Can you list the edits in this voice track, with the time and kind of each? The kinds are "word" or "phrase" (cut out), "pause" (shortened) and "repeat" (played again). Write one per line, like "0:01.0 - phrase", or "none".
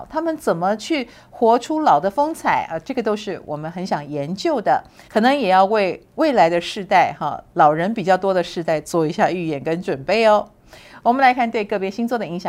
0:05.0 - pause